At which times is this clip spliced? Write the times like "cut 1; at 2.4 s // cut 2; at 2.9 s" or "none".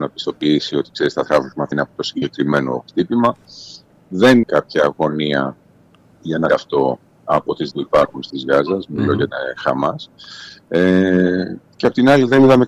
cut 1; at 1.7 s // cut 2; at 4.4 s // cut 3; at 6.5 s // cut 4; at 7.7 s // cut 5; at 8.3 s // cut 6; at 9.3 s